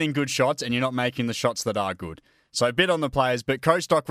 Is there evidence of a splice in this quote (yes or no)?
no